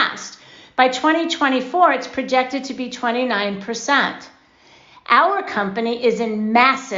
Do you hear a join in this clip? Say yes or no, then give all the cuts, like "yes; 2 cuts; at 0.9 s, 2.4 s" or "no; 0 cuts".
no; 0 cuts